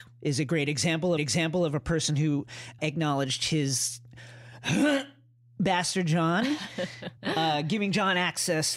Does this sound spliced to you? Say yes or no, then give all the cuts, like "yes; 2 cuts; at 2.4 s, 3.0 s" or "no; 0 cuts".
yes; 3 cuts; at 1.2 s, 2.8 s, 7.2 s